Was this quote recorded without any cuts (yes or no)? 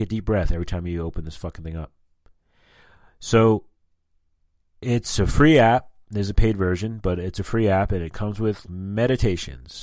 no